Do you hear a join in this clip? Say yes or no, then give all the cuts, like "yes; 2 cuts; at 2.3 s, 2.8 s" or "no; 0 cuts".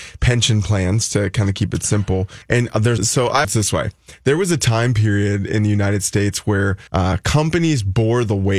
yes; 4 cuts; at 2.4 s, 3.0 s, 3.4 s, 6.9 s